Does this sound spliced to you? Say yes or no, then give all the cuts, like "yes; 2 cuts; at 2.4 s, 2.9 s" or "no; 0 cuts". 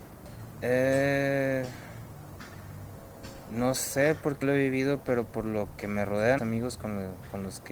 yes; 2 cuts; at 4.4 s, 6.4 s